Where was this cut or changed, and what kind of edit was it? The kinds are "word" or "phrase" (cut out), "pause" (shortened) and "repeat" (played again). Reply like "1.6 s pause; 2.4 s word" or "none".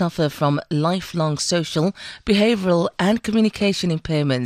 none